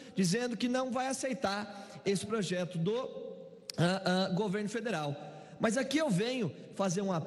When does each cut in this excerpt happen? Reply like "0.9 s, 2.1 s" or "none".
2.0 s